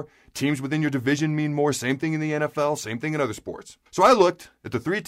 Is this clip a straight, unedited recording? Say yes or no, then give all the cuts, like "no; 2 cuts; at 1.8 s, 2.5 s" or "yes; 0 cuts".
no; 1 cut; at 3.9 s